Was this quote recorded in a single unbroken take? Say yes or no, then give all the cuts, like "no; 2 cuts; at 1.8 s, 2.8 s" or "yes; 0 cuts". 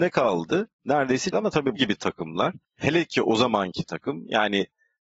no; 3 cuts; at 1.3 s, 1.8 s, 2.6 s